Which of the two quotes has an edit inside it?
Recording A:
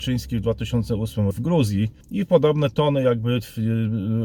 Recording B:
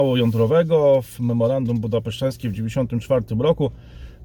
A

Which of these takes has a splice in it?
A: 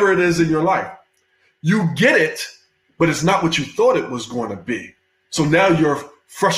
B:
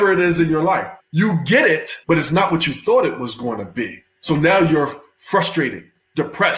B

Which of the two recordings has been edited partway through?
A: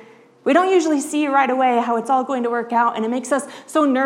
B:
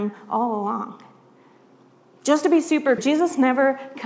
B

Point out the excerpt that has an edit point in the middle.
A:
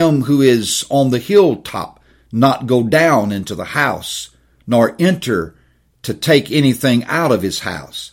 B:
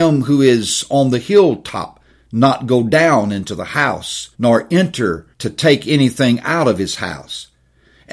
B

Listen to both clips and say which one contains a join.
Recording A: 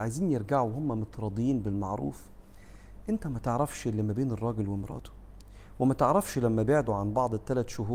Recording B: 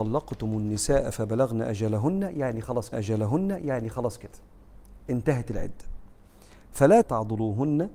B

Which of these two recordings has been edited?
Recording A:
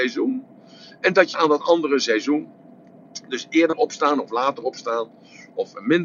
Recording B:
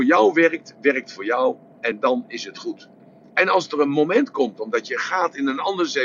A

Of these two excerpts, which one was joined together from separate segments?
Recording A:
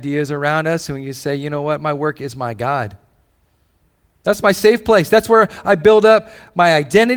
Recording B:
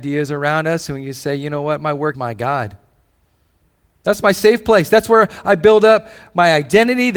B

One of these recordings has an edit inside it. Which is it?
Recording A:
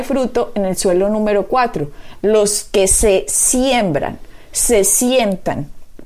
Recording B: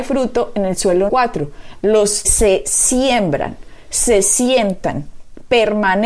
B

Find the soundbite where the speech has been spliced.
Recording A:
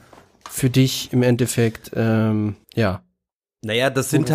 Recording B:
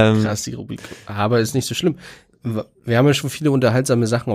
A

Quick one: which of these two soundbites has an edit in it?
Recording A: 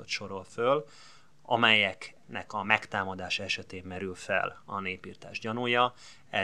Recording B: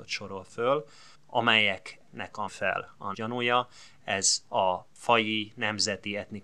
B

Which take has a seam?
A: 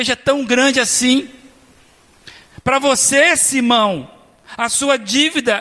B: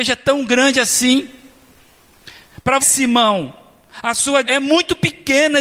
B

